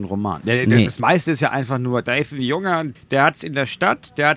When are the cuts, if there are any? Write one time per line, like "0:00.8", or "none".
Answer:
0:02.9